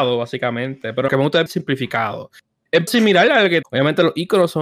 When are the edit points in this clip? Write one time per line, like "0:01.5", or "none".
0:01.1
0:01.5
0:02.9
0:03.6